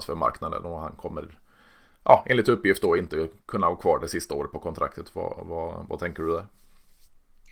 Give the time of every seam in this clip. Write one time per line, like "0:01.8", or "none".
none